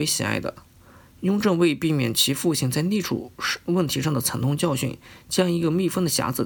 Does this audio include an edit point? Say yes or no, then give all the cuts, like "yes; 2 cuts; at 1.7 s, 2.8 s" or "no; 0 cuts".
no; 0 cuts